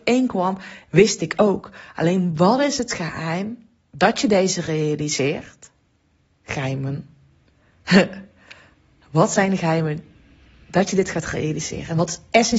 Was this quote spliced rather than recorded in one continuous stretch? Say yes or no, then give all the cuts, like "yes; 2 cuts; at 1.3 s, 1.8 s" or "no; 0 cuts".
no; 0 cuts